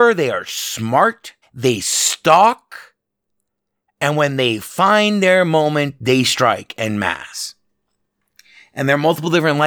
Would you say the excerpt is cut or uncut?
cut